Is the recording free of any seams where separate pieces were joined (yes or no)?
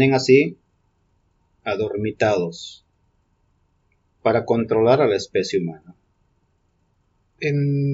yes